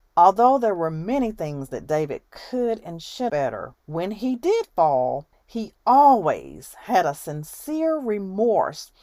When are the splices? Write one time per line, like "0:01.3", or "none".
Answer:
0:03.3
0:03.8